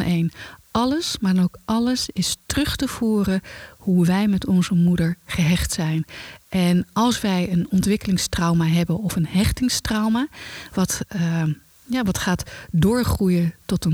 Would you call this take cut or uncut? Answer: uncut